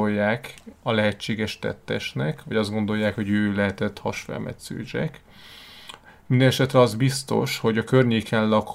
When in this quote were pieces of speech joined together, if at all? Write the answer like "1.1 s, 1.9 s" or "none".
none